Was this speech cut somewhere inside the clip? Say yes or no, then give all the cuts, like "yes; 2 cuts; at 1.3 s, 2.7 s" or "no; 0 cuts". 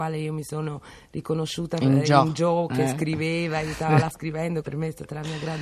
yes; 2 cuts; at 4.1 s, 4.6 s